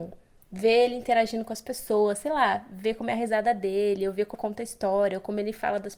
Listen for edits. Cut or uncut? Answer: cut